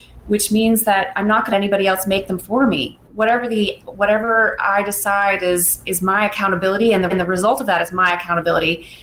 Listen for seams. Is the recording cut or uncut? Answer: cut